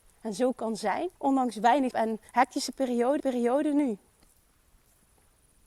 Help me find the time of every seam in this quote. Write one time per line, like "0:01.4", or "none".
0:01.2
0:01.9
0:02.3
0:03.2